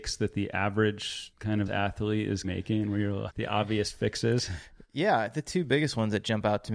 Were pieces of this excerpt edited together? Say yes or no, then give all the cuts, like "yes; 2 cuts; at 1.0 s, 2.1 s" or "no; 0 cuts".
yes; 3 cuts; at 1.7 s, 2.4 s, 3.3 s